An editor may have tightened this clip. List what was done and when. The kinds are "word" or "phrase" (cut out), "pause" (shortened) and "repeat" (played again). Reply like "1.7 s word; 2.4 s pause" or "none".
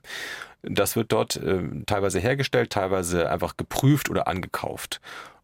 none